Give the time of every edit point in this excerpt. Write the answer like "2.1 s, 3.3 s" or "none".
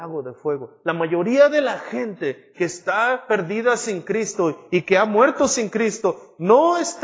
none